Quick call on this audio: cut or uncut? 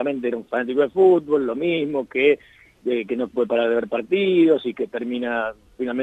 uncut